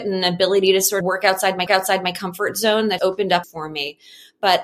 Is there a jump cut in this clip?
yes; 4 cuts; at 1.0 s, 1.7 s, 3.0 s, 3.4 s

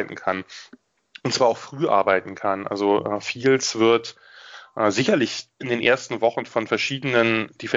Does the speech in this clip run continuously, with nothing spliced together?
yes; 0 cuts

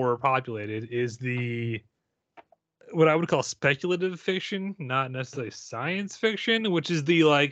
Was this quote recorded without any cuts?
yes; 0 cuts

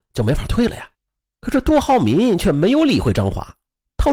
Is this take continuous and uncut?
no; 1 cut; at 0.9 s

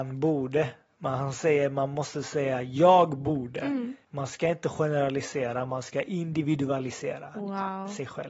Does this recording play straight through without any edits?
no; 1 cut; at 4.0 s

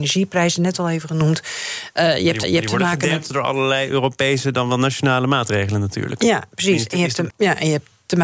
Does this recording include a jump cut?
yes; 2 cuts; at 2.4 s, 7.3 s

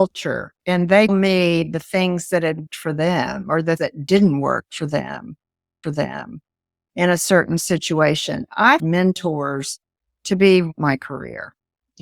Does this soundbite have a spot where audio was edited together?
yes; 6 cuts; at 1.1 s, 2.7 s, 3.8 s, 5.8 s, 8.8 s, 10.7 s

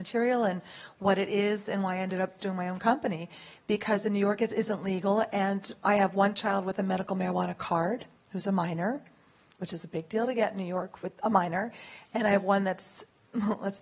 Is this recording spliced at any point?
no; 0 cuts

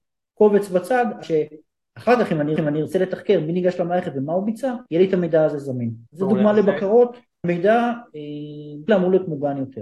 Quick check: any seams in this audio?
yes; 6 cuts; at 1.2 s, 2.6 s, 4.9 s, 6.1 s, 7.4 s, 8.9 s

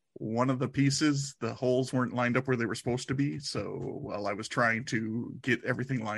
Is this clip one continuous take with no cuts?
yes; 0 cuts

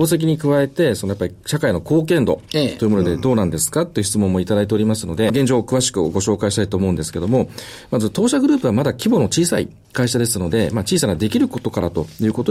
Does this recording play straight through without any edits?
no; 1 cut; at 5.3 s

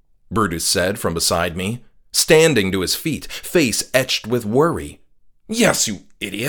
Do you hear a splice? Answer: no; 0 cuts

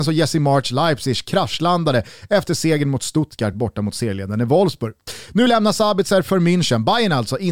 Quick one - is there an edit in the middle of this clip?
no; 0 cuts

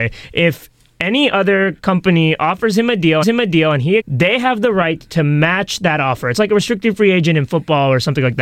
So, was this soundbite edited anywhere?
yes; 2 cuts; at 3.2 s, 4.0 s

